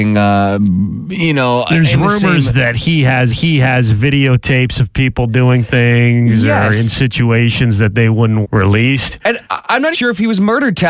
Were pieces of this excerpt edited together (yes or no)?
yes